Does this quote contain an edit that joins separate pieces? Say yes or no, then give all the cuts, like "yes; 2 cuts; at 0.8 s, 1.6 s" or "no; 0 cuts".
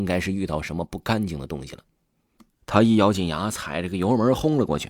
no; 0 cuts